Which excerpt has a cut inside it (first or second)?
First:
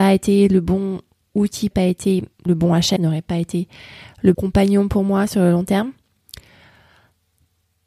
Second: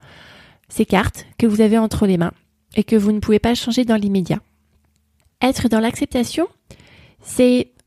first